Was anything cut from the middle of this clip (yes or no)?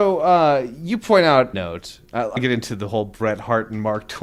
yes